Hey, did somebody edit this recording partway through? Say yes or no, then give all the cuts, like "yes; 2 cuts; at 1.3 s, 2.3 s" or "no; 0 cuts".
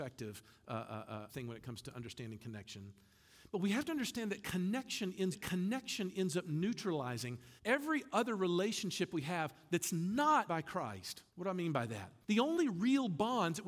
yes; 6 cuts; at 1.3 s, 5.3 s, 7.6 s, 10.5 s, 11.3 s, 12.2 s